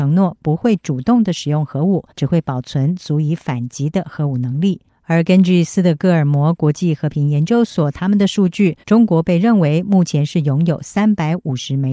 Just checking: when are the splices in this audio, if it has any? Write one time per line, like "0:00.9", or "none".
0:02.1
0:04.9
0:08.8